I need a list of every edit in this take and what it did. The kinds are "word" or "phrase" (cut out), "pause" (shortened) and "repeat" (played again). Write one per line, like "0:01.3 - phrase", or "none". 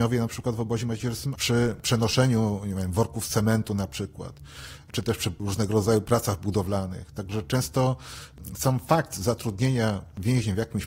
0:01.3 - word